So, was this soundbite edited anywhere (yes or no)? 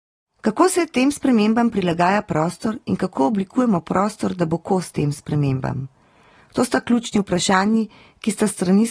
no